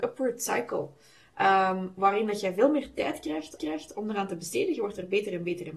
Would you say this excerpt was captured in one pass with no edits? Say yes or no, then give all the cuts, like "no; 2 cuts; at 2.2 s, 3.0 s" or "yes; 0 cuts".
no; 1 cut; at 3.6 s